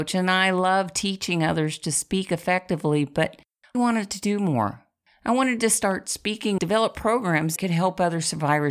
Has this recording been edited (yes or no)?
yes